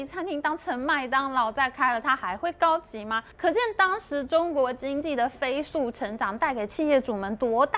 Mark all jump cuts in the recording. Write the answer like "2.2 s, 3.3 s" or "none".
3.3 s